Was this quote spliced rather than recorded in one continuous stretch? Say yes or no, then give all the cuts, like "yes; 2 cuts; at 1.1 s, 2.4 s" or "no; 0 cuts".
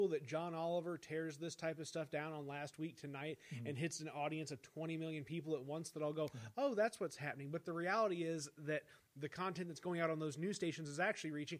no; 0 cuts